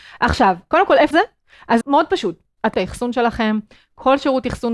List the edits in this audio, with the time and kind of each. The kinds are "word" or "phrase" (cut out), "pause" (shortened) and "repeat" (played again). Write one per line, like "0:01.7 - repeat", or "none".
0:01.1 - phrase
0:01.8 - word
0:02.7 - phrase